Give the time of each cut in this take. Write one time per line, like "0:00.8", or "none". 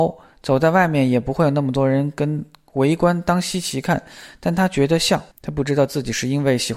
0:05.3